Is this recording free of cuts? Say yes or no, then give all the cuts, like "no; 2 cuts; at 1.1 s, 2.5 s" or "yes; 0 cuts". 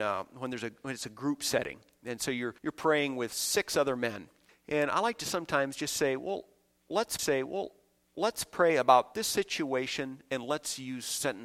no; 3 cuts; at 2.6 s, 4.5 s, 7.2 s